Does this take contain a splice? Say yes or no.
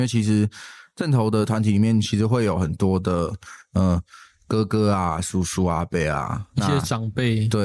no